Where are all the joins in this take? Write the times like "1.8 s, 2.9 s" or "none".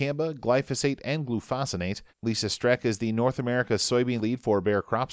2.1 s, 4.2 s